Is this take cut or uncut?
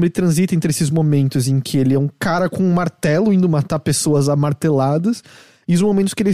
uncut